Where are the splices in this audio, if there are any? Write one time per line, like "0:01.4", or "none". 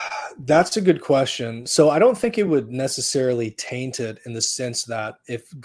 none